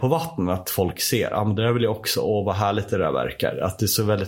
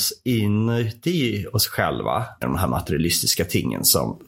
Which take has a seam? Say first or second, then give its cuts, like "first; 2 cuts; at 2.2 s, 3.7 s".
second; 1 cut; at 2.4 s